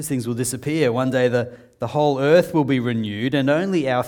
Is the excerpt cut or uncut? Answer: uncut